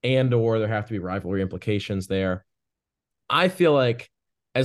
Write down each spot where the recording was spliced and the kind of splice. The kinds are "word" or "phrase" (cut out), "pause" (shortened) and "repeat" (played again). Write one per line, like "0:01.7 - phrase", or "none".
none